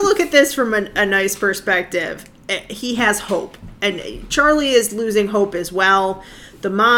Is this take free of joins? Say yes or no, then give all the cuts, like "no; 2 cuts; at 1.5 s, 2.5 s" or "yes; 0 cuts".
yes; 0 cuts